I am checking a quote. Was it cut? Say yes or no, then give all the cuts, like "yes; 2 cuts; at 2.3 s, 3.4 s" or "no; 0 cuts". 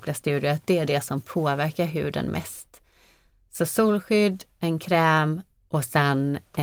no; 0 cuts